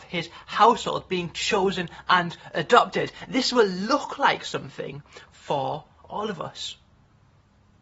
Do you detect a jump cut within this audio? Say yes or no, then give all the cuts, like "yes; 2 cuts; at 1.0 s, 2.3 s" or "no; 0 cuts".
no; 0 cuts